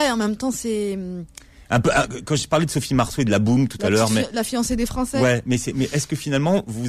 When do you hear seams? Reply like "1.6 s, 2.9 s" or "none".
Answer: none